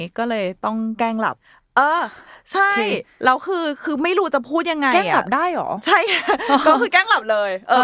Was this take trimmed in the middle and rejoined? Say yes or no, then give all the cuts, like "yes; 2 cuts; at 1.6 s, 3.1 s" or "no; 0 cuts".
no; 0 cuts